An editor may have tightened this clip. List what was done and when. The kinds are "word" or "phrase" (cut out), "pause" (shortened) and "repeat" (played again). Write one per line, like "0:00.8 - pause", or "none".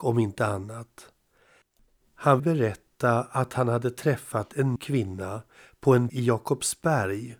0:02.4 - word
0:04.8 - word
0:06.1 - word